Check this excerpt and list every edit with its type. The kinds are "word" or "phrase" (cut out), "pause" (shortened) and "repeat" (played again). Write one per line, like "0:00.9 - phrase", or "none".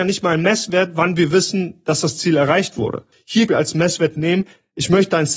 0:03.5 - phrase